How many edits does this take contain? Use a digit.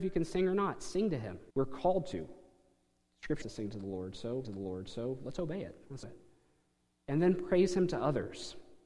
4